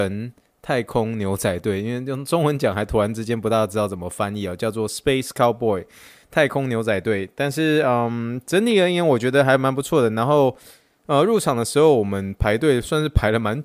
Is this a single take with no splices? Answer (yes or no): yes